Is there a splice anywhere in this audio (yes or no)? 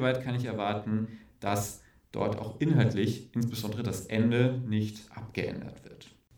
no